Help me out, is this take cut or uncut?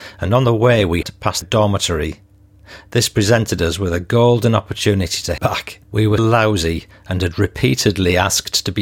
cut